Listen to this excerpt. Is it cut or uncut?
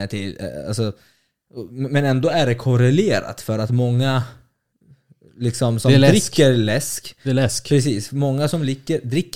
uncut